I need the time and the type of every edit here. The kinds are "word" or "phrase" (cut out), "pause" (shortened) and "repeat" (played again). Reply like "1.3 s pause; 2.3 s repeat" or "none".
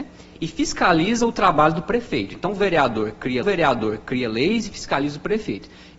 3.4 s repeat